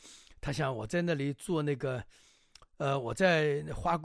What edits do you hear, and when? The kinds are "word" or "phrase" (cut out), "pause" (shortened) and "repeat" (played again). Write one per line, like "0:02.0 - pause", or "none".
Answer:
none